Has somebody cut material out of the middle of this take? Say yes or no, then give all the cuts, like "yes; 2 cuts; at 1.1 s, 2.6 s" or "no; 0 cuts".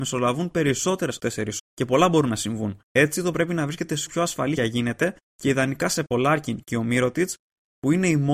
yes; 8 cuts; at 1.2 s, 1.6 s, 2.9 s, 3.3 s, 4.1 s, 4.6 s, 5.2 s, 6.1 s